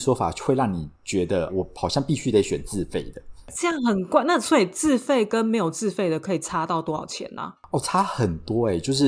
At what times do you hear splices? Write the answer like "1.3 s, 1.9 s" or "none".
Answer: 0.9 s, 1.5 s